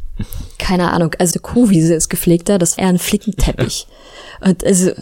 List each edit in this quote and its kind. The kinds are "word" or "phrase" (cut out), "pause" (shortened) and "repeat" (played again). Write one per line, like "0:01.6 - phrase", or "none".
0:01.3 - word
0:02.8 - word